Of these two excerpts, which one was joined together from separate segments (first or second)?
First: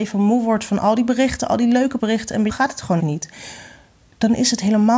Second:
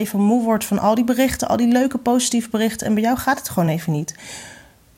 first